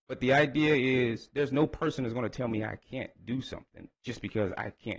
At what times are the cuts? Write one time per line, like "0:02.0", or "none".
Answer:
none